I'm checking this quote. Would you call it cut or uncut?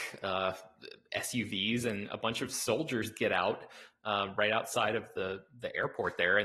uncut